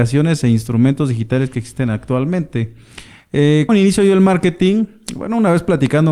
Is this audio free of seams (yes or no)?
no